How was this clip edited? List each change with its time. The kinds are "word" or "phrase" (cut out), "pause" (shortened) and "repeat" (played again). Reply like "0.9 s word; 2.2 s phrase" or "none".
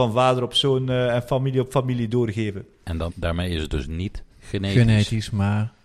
3.1 s word; 4.3 s pause